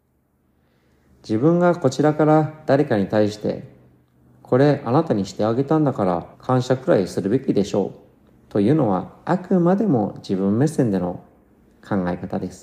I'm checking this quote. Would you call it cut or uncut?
cut